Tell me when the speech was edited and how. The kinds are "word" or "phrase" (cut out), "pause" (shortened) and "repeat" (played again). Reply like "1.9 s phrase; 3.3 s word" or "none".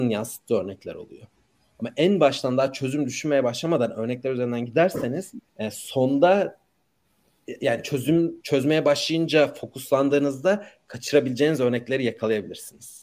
5.5 s pause; 8.4 s pause